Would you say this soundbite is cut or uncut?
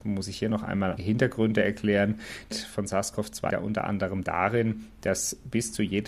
cut